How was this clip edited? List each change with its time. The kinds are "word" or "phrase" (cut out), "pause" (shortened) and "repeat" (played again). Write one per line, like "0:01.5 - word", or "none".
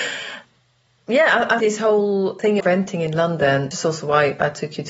0:01.6 - word
0:02.6 - word
0:03.7 - word